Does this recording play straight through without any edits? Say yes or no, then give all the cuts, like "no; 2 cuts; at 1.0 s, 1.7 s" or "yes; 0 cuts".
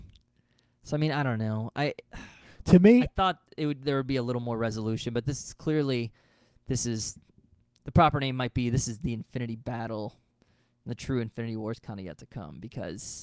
yes; 0 cuts